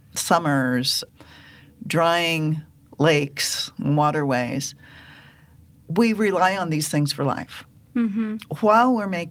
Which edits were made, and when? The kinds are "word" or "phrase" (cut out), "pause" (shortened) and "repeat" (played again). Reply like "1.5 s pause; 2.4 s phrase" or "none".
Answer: none